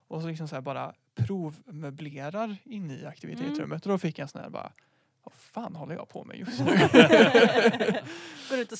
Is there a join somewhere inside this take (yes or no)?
no